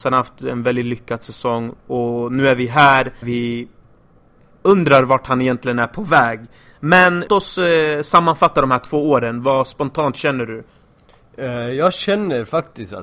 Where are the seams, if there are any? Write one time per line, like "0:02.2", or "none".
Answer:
0:01.8
0:03.2
0:07.3